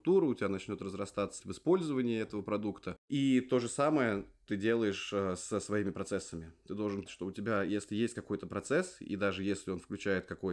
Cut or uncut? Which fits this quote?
cut